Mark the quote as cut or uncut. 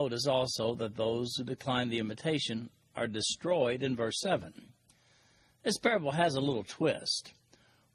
uncut